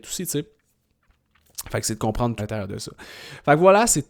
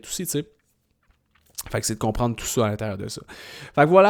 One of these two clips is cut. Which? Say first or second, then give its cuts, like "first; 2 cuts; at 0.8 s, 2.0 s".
first; 1 cut; at 2.4 s